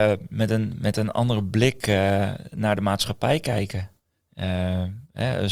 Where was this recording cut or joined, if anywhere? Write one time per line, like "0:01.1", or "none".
none

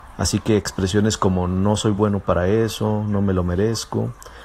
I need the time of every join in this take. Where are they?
none

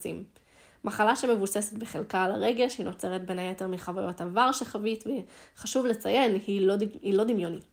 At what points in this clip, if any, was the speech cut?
none

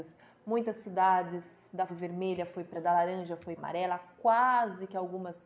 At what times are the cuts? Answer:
0:01.9
0:02.7
0:03.6

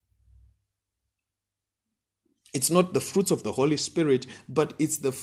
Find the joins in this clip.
none

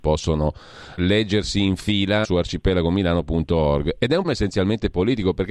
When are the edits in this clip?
0:01.0
0:02.2
0:04.2

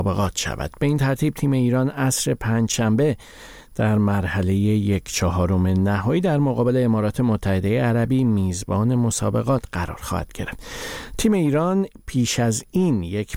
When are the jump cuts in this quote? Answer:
none

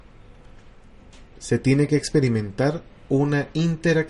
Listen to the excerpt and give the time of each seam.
none

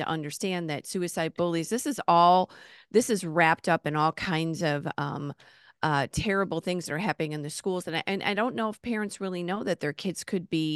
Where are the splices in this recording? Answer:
none

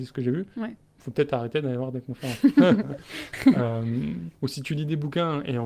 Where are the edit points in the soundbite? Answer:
0:04.3

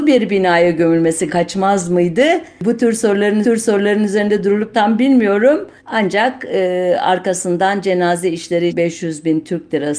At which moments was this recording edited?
0:01.3
0:03.4
0:04.7
0:05.8
0:08.7

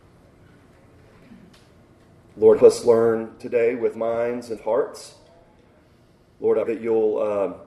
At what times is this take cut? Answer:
0:02.6
0:03.4
0:03.9
0:04.6
0:06.7

